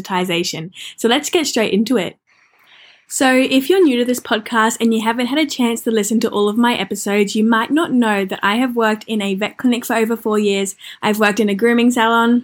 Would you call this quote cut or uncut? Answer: uncut